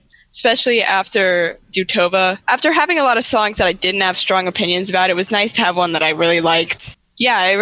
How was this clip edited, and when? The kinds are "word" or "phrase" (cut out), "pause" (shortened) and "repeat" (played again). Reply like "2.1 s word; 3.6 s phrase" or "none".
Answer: 2.4 s pause